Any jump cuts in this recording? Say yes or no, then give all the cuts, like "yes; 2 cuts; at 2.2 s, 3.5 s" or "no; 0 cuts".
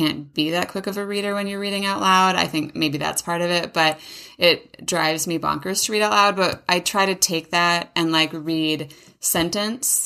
no; 0 cuts